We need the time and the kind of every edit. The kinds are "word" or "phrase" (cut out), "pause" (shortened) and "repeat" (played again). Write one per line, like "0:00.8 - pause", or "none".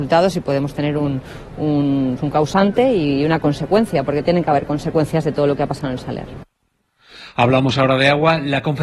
0:02.2 - word